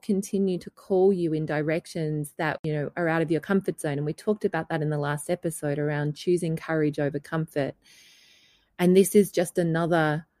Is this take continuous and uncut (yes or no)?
yes